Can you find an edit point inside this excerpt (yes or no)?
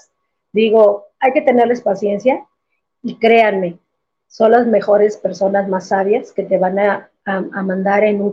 no